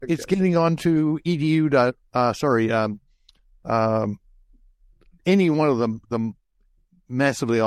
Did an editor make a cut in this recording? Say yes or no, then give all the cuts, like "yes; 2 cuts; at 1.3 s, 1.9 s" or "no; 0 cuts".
no; 0 cuts